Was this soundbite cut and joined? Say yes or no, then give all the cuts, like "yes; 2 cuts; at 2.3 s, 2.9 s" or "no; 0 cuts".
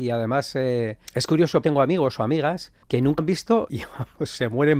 yes; 5 cuts; at 1.1 s, 1.6 s, 2.8 s, 3.2 s, 3.7 s